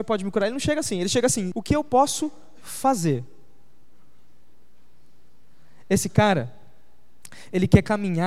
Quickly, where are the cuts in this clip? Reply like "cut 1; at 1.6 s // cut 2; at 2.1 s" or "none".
cut 1; at 1.5 s